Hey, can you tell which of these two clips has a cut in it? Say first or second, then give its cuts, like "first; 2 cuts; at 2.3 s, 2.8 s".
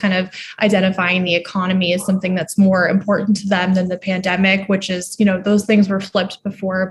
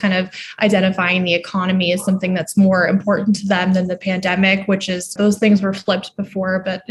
second; 1 cut; at 5.2 s